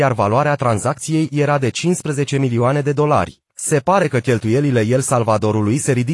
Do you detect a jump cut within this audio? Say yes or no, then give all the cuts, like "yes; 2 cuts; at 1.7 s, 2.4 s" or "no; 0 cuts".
yes; 1 cut; at 3.5 s